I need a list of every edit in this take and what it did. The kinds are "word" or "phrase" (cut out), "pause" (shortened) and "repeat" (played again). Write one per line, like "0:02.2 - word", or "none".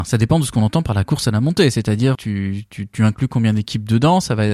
0:02.1 - word